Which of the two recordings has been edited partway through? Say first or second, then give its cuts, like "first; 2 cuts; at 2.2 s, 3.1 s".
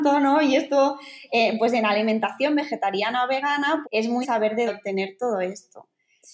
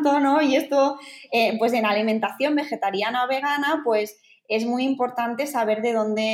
first; 3 cuts; at 3.8 s, 4.2 s, 4.7 s